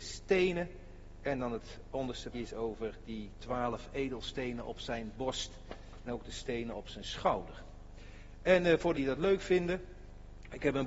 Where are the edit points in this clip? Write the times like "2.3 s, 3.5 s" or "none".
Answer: 2.3 s, 6.1 s, 8.9 s